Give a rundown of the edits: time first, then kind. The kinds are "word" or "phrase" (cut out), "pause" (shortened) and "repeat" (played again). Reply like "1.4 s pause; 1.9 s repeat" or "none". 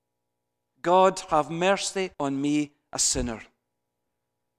2.1 s pause